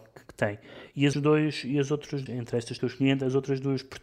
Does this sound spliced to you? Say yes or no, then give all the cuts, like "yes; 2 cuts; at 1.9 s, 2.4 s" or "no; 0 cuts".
yes; 3 cuts; at 1.1 s, 2.3 s, 2.8 s